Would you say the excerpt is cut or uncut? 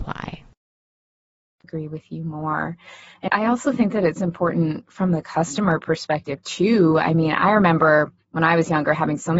cut